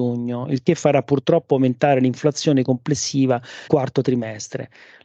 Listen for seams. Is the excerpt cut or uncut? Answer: cut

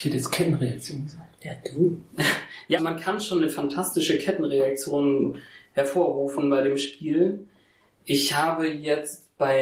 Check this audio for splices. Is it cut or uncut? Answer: cut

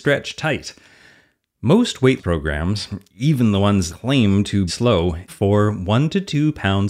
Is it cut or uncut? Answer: cut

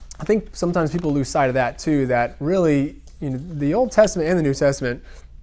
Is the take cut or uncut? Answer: uncut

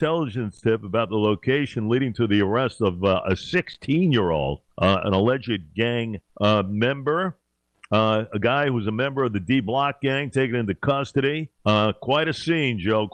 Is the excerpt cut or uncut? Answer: cut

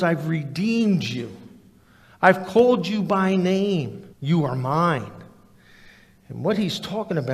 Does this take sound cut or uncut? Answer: cut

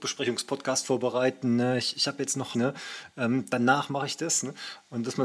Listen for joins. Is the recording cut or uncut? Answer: cut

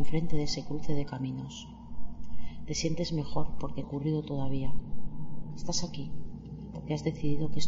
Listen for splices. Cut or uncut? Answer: cut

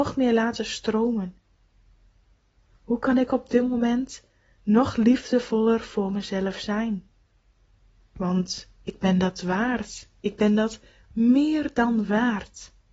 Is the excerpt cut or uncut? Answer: uncut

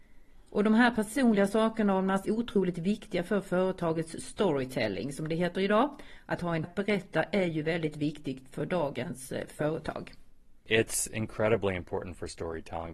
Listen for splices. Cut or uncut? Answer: cut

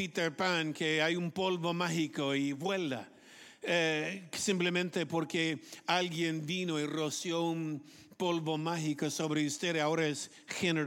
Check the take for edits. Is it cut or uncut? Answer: uncut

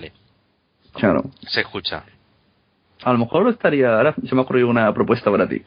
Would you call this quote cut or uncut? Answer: uncut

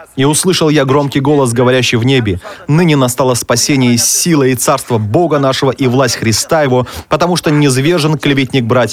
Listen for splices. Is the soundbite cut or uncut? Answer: uncut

